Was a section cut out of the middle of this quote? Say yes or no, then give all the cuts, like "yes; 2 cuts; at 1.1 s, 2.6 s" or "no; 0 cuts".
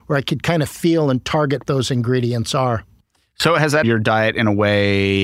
yes; 2 cuts; at 1.6 s, 3.8 s